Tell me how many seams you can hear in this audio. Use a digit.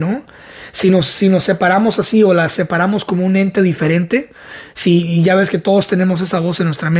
0